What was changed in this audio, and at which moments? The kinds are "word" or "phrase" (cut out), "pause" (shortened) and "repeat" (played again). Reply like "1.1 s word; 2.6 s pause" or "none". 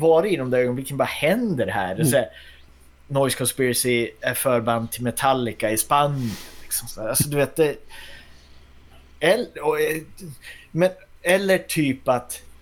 none